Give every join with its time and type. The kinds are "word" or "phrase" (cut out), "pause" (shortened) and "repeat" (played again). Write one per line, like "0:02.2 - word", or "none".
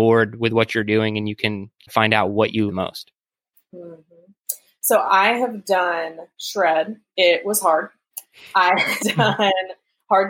0:01.9 - word
0:02.7 - word
0:09.0 - word